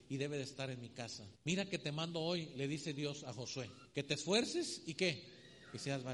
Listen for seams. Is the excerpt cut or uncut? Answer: cut